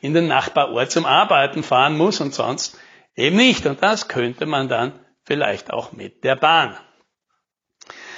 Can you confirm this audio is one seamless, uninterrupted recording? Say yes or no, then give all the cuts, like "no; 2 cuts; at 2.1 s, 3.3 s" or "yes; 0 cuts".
yes; 0 cuts